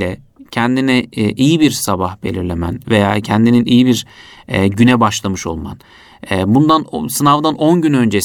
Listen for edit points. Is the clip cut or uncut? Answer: uncut